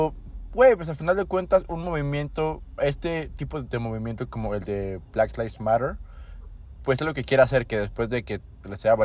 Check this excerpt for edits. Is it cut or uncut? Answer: cut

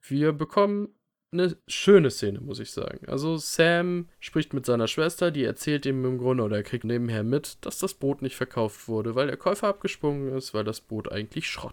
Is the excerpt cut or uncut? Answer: cut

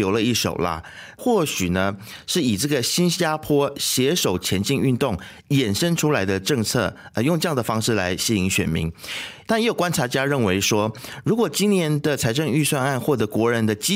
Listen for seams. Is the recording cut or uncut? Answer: uncut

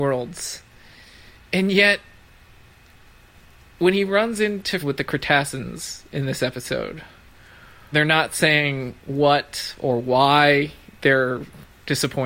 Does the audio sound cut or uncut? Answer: cut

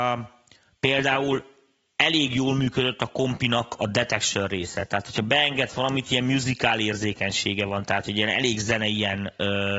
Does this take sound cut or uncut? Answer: uncut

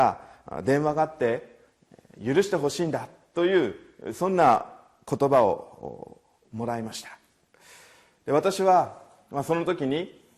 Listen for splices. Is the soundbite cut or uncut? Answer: uncut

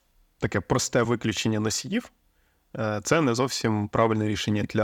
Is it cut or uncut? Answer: uncut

